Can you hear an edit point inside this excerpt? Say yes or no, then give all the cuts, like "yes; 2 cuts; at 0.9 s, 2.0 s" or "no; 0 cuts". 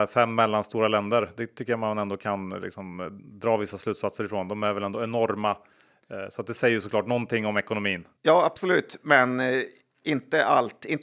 yes; 1 cut; at 8.2 s